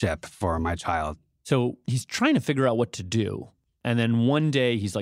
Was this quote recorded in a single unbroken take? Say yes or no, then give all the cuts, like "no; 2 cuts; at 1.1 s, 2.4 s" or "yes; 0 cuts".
yes; 0 cuts